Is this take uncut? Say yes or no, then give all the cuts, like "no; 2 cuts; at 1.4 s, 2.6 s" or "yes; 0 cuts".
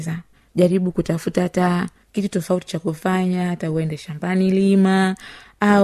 yes; 0 cuts